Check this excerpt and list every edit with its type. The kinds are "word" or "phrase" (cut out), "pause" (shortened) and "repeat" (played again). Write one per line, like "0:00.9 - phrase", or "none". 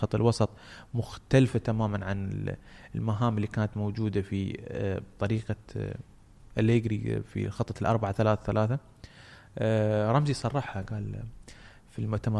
none